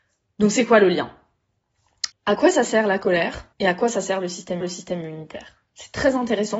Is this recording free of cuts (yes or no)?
no